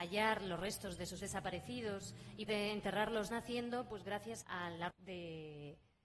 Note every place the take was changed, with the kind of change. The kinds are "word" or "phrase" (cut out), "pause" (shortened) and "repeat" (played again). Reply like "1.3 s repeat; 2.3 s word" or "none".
1.2 s word; 2.5 s word; 3.3 s phrase; 4.4 s word; 4.9 s word